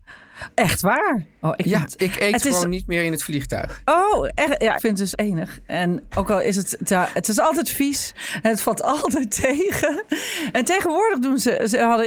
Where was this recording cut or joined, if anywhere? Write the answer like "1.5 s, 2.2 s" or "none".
2.0 s, 4.8 s, 5.1 s, 6.1 s